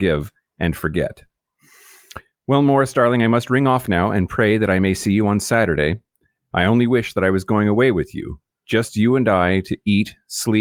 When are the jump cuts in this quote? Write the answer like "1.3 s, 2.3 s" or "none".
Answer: none